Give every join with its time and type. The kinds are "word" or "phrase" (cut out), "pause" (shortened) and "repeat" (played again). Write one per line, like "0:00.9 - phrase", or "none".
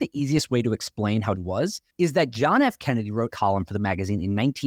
0:01.4 - phrase
0:01.9 - pause
0:03.3 - phrase

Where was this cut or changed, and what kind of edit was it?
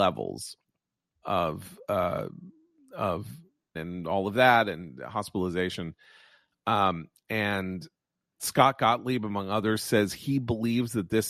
0:01.2 - word
0:03.8 - word
0:08.4 - word

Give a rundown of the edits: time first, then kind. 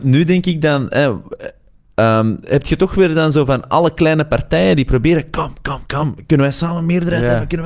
none

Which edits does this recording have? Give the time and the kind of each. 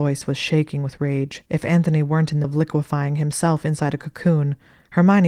0:01.5 - pause
0:02.4 - word

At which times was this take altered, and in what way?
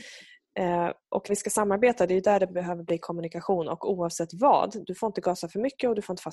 0:01.3 - word

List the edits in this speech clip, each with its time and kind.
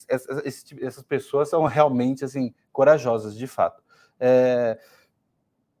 none

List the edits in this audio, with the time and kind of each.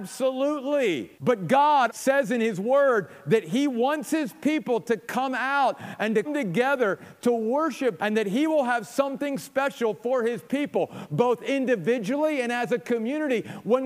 0:01.2 - pause
0:01.9 - word
0:06.2 - word
0:08.0 - word

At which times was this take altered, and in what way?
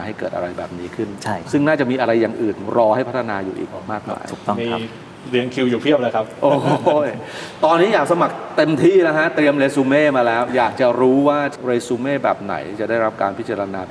0:01.4 - phrase

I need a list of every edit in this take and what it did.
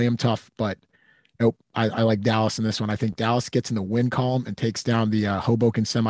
none

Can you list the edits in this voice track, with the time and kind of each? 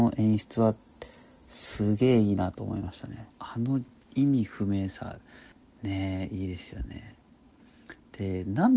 0:03.3 - pause
0:05.5 - pause

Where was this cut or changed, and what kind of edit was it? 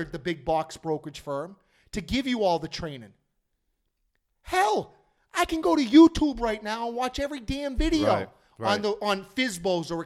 none

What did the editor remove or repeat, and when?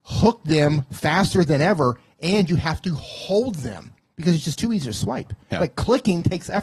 none

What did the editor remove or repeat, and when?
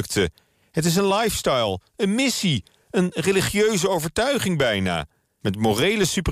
none

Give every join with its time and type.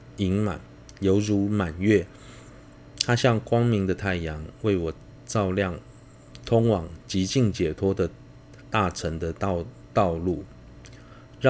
0:08.6 - pause

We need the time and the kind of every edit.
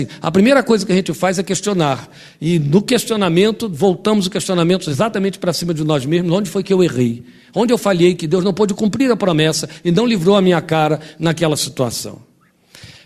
none

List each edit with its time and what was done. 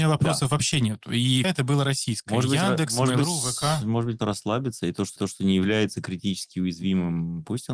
0:01.4 - word
0:04.2 - word
0:05.2 - repeat

